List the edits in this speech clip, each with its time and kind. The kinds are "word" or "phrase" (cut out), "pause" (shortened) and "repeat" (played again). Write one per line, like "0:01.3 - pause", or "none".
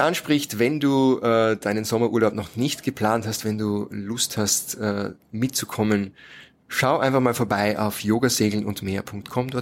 none